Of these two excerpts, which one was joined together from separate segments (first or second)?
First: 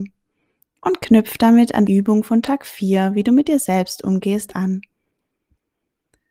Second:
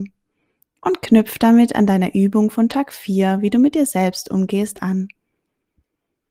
first